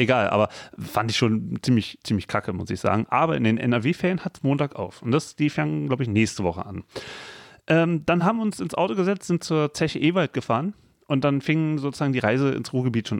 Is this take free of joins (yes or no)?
yes